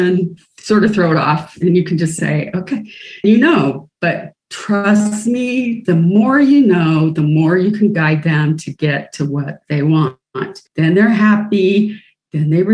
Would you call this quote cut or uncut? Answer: cut